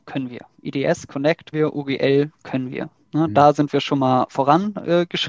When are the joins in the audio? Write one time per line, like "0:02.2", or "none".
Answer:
0:01.5